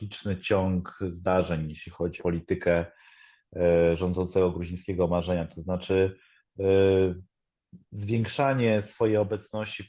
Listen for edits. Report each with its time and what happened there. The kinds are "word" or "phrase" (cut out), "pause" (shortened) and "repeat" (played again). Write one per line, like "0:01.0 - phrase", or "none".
0:02.2 - word
0:07.8 - pause